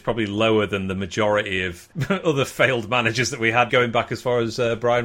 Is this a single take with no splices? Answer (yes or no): no